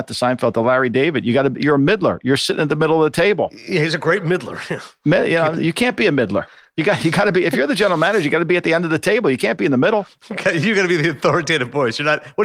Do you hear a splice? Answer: no; 0 cuts

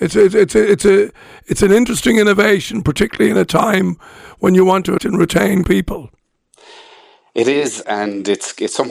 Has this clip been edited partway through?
yes; 3 cuts; at 5.0 s, 5.6 s, 7.8 s

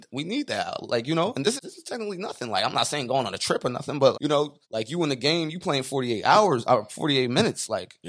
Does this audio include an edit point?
yes; 3 cuts; at 1.6 s, 4.1 s, 4.6 s

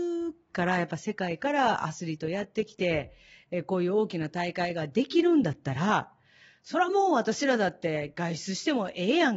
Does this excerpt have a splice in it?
no; 0 cuts

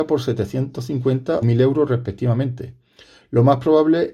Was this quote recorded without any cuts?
no; 1 cut; at 1.4 s

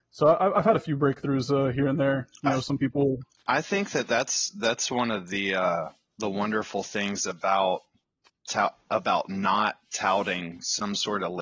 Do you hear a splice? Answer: no; 0 cuts

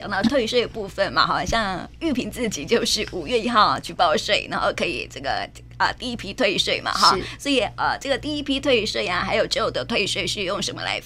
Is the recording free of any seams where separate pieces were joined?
yes; 0 cuts

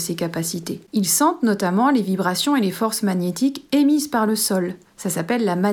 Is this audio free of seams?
yes; 0 cuts

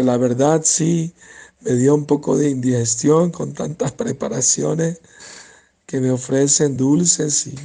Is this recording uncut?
no; 1 cut; at 6.8 s

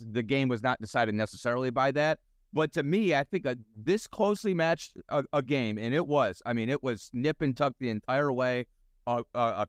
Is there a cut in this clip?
no; 0 cuts

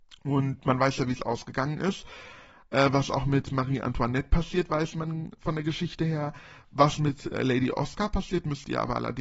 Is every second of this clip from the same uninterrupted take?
yes; 0 cuts

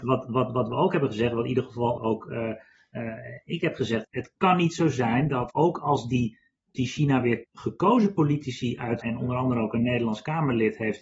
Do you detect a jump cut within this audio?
yes; 6 cuts; at 2.0 s, 4.0 s, 5.5 s, 6.7 s, 7.4 s, 9.0 s

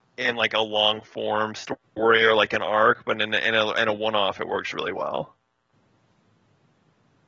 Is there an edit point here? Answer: no; 0 cuts

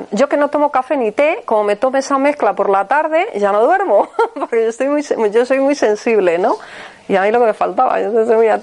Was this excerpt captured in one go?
yes; 0 cuts

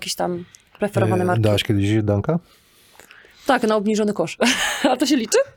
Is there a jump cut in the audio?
no; 0 cuts

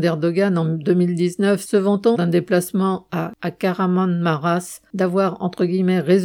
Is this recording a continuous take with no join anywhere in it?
no; 1 cut; at 2.1 s

